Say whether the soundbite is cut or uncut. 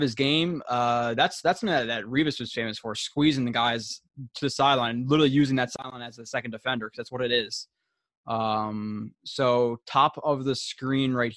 uncut